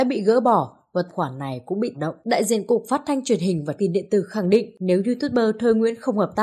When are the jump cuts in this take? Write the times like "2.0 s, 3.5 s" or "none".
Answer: 1.1 s, 1.9 s, 3.8 s